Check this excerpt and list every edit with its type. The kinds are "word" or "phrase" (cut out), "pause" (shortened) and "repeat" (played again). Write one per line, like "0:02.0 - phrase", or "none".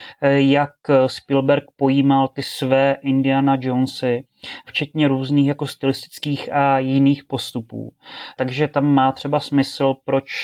none